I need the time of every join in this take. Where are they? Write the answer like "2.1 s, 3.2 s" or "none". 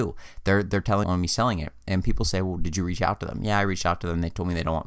1.0 s

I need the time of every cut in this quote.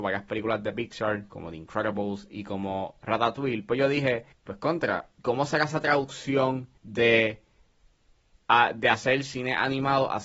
4.3 s, 5.2 s, 6.8 s

